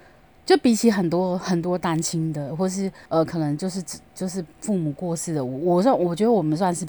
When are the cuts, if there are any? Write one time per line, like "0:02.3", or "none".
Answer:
0:03.0